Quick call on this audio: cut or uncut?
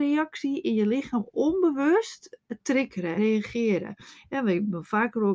cut